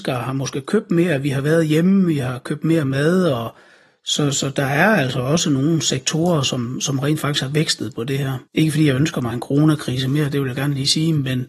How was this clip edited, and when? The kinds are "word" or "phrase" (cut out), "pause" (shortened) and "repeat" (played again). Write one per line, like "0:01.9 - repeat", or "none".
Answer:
0:08.5 - pause